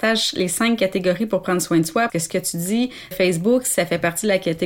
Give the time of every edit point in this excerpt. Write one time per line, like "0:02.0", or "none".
0:02.1
0:03.1